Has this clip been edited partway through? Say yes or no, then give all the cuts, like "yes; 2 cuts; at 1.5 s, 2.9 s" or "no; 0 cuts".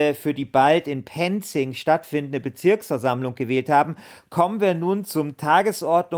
no; 0 cuts